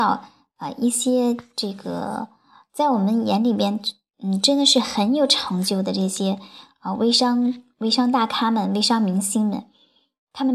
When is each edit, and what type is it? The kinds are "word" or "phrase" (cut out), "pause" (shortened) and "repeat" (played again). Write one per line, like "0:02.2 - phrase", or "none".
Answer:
none